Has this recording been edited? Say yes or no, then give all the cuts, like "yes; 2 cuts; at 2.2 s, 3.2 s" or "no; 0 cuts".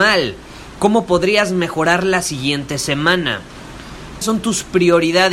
yes; 1 cut; at 4.2 s